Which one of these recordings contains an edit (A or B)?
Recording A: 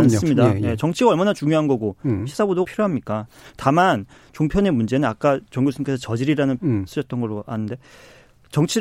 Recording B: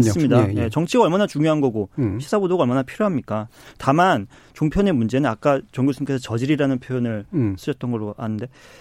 A